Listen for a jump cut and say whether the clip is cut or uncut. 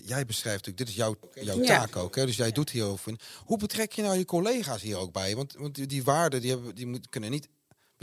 uncut